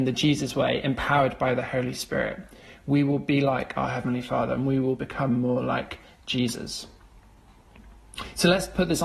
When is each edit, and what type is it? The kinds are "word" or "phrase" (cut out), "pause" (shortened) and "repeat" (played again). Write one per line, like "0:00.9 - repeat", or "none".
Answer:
none